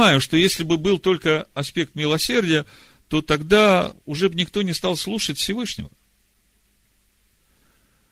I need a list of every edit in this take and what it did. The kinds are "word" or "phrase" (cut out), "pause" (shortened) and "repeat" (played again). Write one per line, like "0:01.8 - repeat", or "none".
none